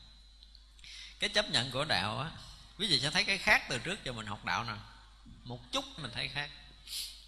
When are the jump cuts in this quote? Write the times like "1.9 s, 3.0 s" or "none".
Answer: 6.0 s